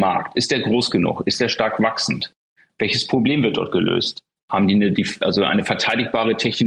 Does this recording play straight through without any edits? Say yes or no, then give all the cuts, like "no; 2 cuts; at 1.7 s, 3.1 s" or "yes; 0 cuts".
yes; 0 cuts